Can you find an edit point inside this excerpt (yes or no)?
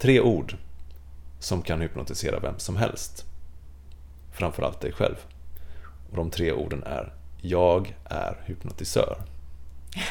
no